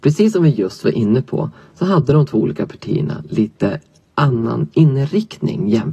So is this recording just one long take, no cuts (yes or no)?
yes